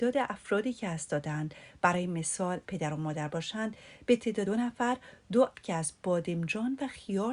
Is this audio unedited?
no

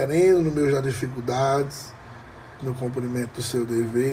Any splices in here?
yes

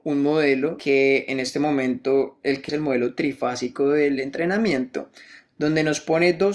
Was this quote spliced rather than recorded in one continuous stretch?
yes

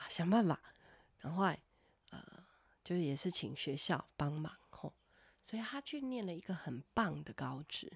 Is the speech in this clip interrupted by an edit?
no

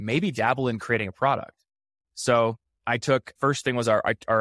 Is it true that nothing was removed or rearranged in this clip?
no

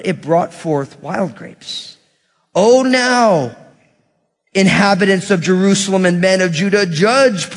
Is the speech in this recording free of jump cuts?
yes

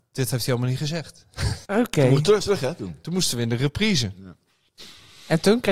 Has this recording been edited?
yes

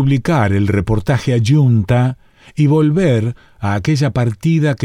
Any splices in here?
no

